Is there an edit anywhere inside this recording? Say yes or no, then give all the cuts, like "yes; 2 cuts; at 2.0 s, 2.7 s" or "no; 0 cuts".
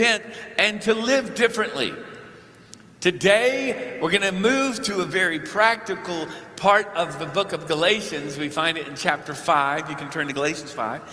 no; 0 cuts